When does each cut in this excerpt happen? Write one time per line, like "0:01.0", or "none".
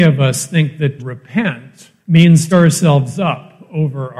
0:01.0
0:02.0
0:02.5